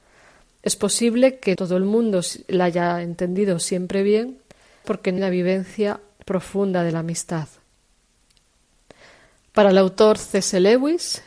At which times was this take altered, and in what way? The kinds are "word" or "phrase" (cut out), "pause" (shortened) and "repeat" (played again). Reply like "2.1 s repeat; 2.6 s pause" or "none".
1.6 s word; 4.8 s word; 5.2 s word